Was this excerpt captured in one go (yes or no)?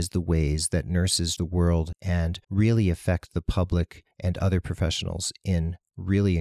no